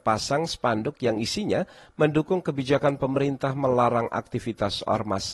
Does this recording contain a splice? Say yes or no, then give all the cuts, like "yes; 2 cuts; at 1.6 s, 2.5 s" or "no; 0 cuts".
no; 0 cuts